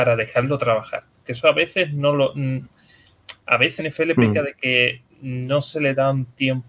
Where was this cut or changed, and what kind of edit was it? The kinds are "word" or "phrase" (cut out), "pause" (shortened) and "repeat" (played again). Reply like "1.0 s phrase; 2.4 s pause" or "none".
3.4 s pause; 3.8 s word; 5.1 s pause